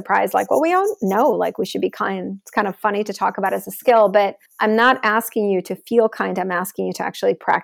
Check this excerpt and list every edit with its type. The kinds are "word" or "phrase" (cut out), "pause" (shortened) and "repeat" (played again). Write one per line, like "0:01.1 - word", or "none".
0:04.5 - pause